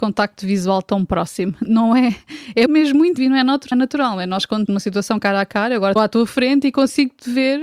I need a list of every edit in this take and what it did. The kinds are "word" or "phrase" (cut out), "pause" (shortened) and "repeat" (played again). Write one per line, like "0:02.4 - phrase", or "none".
0:02.7 - word
0:03.2 - word
0:03.7 - word
0:04.7 - word
0:06.0 - phrase